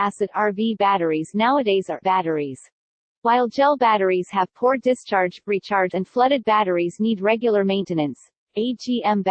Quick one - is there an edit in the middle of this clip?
yes; 2 cuts; at 2.0 s, 5.9 s

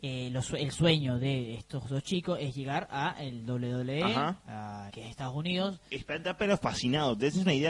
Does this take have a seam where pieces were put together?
yes; 1 cut; at 4.9 s

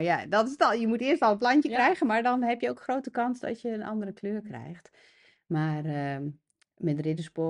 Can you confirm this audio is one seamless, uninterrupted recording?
yes; 0 cuts

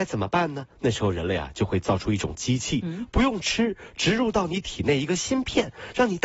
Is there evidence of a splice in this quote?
no; 0 cuts

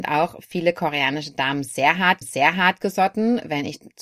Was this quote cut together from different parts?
yes; 1 cut; at 2.2 s

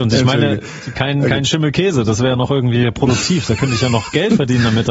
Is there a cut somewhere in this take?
no; 0 cuts

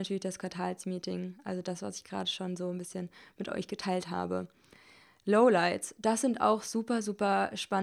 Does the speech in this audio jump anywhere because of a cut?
no; 0 cuts

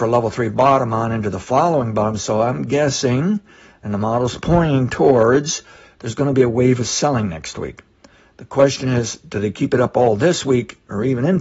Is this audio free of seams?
yes; 0 cuts

